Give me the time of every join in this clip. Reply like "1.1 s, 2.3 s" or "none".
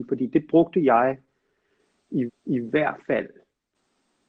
2.3 s